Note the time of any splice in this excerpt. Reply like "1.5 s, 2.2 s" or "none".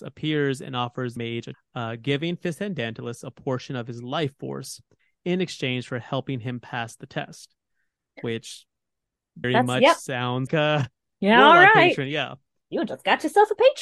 1.2 s, 1.5 s, 9.4 s, 10.5 s